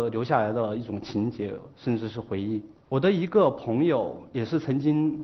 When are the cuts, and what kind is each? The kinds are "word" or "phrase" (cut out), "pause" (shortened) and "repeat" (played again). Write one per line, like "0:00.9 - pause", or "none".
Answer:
0:02.7 - pause
0:04.3 - word

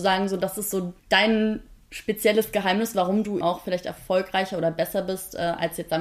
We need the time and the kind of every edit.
0:01.0 - pause
0:03.4 - word

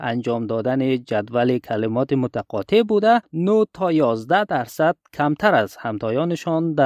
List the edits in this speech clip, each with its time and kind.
none

